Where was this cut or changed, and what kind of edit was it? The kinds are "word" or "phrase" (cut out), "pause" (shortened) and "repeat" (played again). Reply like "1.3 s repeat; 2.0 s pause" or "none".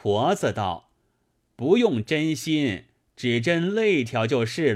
none